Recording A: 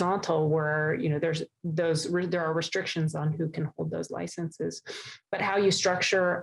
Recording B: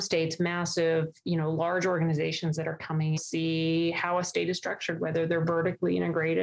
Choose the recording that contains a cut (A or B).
B